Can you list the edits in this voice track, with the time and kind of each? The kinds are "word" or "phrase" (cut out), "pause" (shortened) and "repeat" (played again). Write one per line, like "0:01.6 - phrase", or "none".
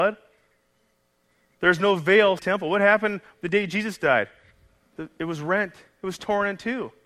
0:02.4 - phrase